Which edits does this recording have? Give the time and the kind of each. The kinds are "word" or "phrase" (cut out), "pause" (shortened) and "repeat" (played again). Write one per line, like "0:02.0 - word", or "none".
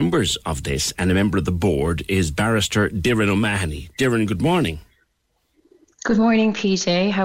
none